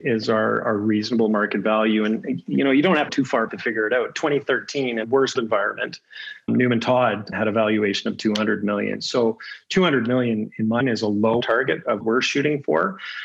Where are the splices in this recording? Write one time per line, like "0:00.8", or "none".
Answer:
0:03.1
0:03.5
0:05.0
0:05.4
0:06.5
0:07.3
0:10.8
0:11.4
0:12.0